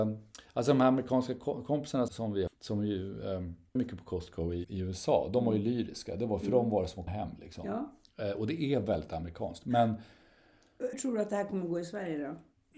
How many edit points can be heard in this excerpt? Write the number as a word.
six